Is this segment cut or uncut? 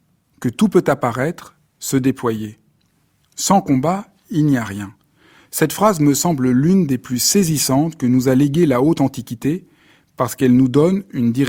uncut